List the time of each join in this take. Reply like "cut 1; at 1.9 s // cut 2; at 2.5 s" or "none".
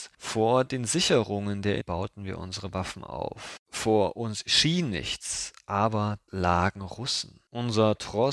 cut 1; at 1.8 s // cut 2; at 6.3 s